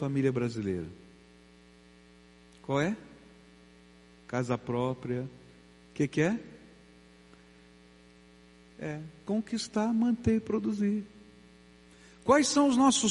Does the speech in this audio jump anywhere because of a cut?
no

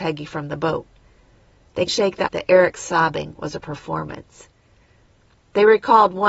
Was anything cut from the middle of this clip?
yes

